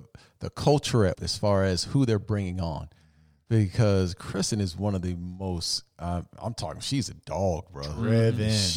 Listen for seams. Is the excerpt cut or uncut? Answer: cut